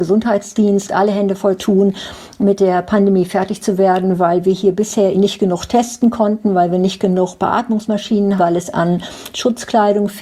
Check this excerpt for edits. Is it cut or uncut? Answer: cut